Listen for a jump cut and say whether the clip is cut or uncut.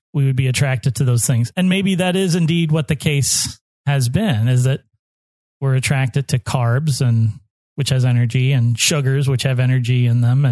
uncut